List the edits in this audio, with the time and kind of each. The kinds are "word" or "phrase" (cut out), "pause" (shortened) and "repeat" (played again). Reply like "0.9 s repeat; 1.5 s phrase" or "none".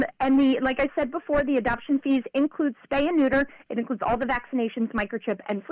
none